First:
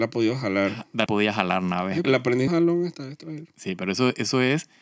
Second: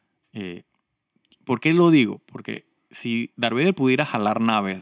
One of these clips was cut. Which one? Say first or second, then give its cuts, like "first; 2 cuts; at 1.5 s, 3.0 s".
first; 3 cuts; at 1.1 s, 2.0 s, 2.5 s